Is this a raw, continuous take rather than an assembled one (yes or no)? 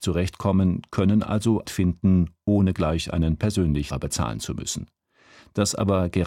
no